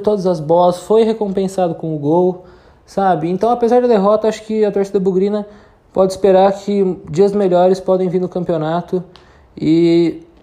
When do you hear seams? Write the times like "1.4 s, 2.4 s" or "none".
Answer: none